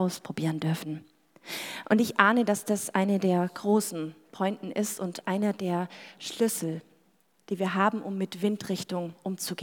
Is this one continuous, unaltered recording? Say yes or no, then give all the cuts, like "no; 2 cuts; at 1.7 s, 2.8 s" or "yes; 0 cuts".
yes; 0 cuts